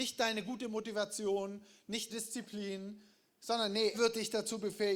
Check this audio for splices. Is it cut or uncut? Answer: cut